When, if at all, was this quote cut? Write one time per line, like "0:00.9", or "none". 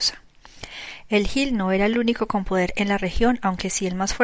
none